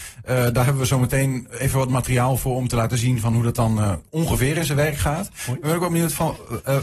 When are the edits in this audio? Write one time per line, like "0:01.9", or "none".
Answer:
none

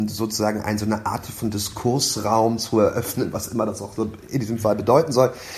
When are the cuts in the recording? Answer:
none

